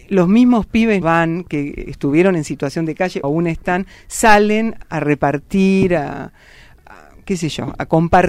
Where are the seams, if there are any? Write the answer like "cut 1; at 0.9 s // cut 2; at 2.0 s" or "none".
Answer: cut 1; at 1.0 s // cut 2; at 3.2 s // cut 3; at 4.8 s

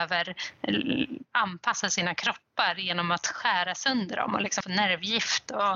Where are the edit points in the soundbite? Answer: cut 1; at 4.6 s

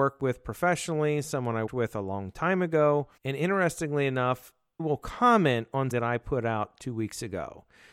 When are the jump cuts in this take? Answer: cut 1; at 1.7 s // cut 2; at 3.2 s // cut 3; at 4.8 s // cut 4; at 5.9 s

